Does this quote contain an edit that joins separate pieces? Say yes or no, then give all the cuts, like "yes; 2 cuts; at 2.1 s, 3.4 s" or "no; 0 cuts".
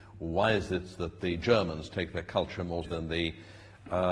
yes; 1 cut; at 2.8 s